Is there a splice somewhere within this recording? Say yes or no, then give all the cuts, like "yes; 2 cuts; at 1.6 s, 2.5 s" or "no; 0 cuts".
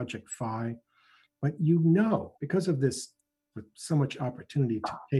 yes; 2 cuts; at 2.3 s, 3.5 s